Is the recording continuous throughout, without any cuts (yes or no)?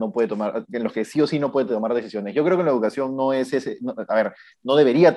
yes